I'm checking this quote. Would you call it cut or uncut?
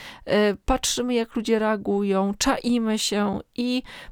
uncut